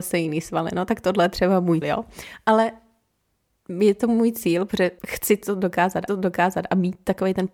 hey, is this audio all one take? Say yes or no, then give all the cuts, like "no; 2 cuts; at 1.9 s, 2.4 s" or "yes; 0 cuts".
no; 3 cuts; at 1.8 s, 5.0 s, 6.1 s